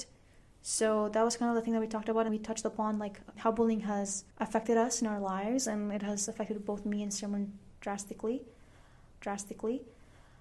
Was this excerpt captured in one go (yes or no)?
no